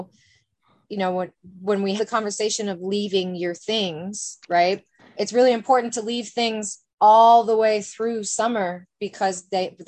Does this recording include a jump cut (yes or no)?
yes